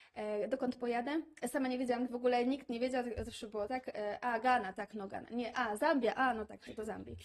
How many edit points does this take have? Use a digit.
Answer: 1